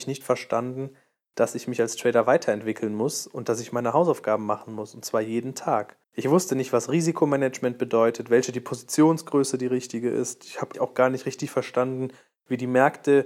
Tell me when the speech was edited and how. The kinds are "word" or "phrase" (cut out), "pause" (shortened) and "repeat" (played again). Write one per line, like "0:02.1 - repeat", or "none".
0:06.0 - pause
0:10.7 - word